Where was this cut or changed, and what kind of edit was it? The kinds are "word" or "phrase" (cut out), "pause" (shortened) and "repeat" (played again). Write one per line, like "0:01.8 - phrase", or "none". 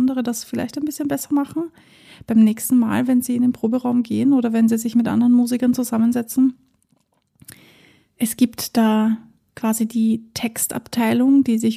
none